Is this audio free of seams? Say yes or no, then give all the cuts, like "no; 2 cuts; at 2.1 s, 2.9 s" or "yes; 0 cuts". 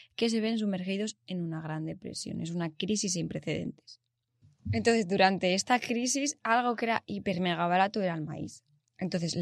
yes; 0 cuts